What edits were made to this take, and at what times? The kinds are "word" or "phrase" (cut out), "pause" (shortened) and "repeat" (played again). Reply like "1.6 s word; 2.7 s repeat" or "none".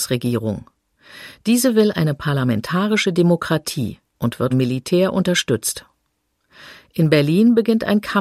4.1 s pause; 4.5 s word

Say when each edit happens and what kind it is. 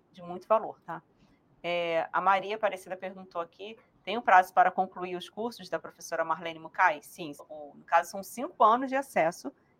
7.4 s word

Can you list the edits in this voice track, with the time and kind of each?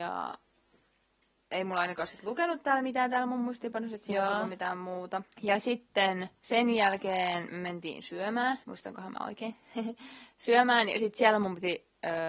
5.3 s pause; 6.4 s pause; 8.6 s pause

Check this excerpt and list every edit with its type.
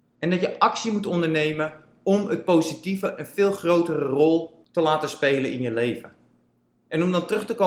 none

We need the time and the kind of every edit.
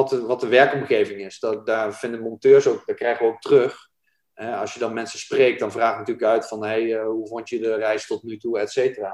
none

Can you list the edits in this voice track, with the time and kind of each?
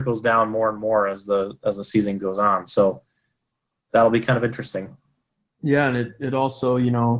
none

